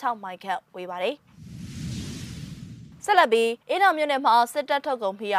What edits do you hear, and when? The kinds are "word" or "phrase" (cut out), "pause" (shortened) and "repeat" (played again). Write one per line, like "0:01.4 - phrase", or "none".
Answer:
0:03.6 - pause